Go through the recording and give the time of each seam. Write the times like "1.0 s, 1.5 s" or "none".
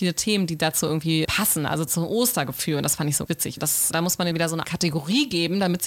1.2 s, 1.9 s, 3.3 s, 3.6 s, 3.9 s, 4.3 s, 4.6 s